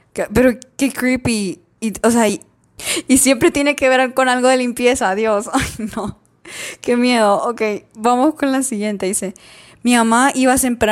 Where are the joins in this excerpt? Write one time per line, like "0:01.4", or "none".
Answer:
none